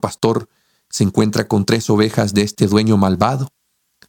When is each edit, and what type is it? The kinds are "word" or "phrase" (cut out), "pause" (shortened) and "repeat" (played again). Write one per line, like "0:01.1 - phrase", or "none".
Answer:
none